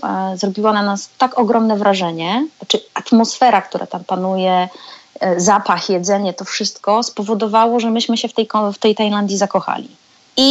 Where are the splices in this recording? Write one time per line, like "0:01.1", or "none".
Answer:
0:02.5